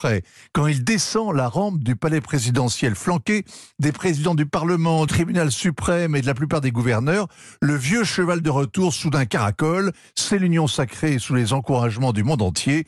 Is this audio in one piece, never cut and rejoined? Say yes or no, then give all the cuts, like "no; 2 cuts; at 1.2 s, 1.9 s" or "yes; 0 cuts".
no; 1 cut; at 5.1 s